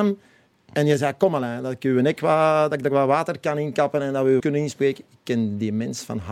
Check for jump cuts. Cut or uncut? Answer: cut